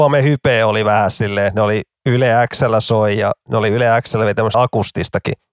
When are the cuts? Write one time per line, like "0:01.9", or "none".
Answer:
0:04.5